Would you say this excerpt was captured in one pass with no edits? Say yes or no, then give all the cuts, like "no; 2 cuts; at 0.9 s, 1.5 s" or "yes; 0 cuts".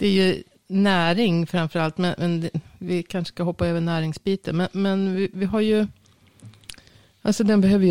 yes; 0 cuts